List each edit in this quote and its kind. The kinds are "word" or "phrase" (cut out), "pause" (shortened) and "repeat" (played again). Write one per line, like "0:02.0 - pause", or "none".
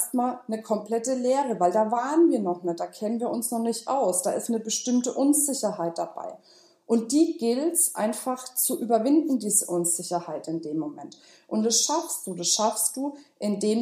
none